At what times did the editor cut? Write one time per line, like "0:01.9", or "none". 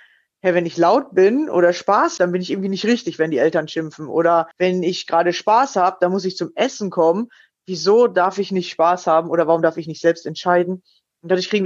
0:02.2
0:04.5